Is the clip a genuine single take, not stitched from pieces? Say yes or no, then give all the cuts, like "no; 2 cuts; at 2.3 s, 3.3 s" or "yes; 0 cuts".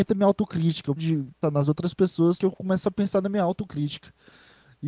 no; 3 cuts; at 1.0 s, 1.4 s, 2.4 s